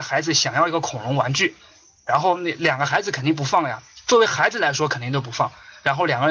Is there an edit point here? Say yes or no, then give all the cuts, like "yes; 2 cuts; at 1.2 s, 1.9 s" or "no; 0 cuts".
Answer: no; 0 cuts